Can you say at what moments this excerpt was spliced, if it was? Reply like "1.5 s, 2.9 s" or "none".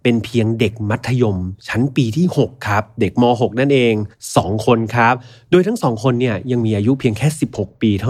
4.1 s